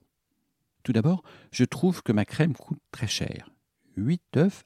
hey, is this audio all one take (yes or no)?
yes